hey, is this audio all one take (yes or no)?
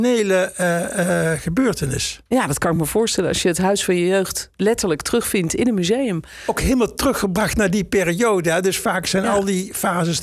yes